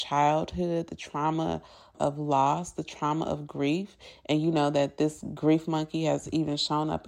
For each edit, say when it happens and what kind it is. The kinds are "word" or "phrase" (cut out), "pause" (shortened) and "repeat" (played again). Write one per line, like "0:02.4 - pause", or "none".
none